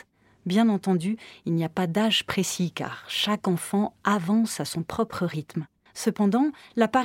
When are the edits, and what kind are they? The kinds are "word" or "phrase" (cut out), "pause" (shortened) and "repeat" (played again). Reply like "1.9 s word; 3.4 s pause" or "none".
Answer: 5.9 s pause

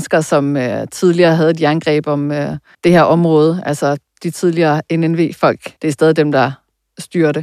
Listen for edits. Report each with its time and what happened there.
2.7 s pause; 5.8 s pause

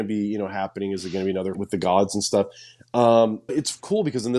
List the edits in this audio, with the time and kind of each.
1.5 s word; 3.5 s word

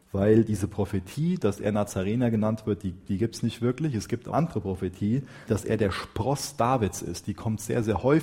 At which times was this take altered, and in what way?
4.3 s word; 5.5 s word

